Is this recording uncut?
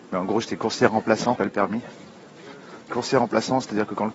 no; 2 cuts; at 1.4 s, 2.9 s

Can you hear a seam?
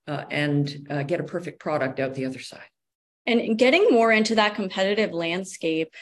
no; 0 cuts

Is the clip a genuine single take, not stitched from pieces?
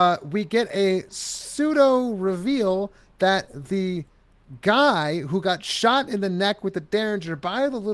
yes; 0 cuts

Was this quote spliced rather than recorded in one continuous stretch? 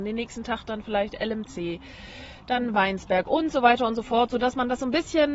no; 0 cuts

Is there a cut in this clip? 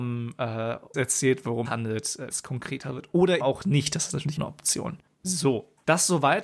yes; 5 cuts; at 0.9 s, 1.6 s, 2.3 s, 3.4 s, 4.4 s

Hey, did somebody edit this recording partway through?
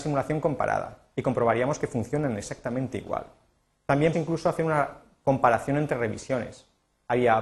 yes; 1 cut; at 4.1 s

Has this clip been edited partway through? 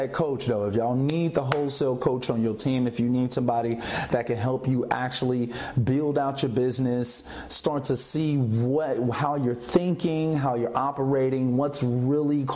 no; 0 cuts

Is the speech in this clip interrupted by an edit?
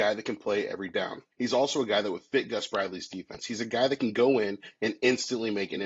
yes; 1 cut; at 1.3 s

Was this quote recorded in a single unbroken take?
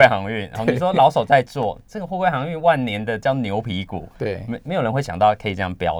yes; 0 cuts

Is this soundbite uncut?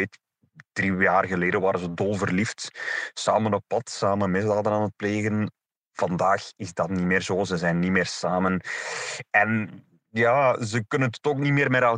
yes; 0 cuts

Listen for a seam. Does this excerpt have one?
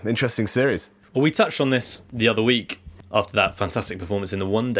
no; 0 cuts

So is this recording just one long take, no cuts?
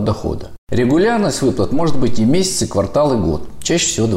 yes; 0 cuts

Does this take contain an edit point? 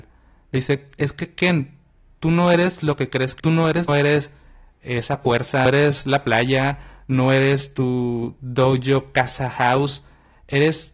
yes; 3 cuts; at 3.4 s, 3.9 s, 5.7 s

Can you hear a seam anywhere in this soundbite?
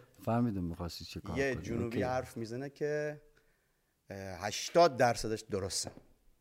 no; 0 cuts

